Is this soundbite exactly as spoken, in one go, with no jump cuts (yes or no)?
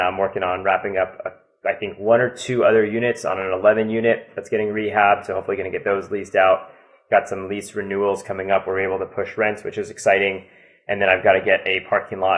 yes